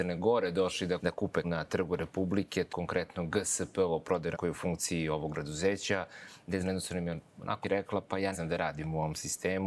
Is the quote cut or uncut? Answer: cut